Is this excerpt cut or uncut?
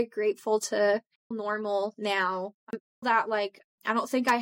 cut